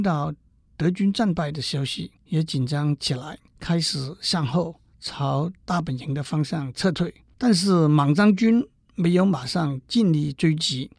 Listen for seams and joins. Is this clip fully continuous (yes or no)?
no